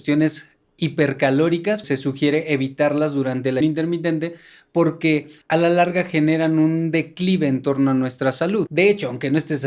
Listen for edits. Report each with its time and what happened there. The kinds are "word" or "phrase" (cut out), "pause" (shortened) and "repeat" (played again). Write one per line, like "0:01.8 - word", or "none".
0:01.8 - word
0:03.6 - word